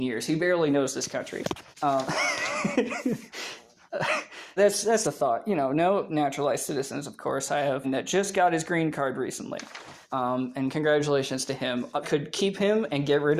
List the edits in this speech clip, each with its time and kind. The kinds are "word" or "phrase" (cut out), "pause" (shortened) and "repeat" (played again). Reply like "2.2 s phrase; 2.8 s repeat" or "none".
1.7 s pause; 4.6 s word; 5.0 s word; 6.1 s phrase; 7.8 s phrase; 10.0 s pause; 12.0 s phrase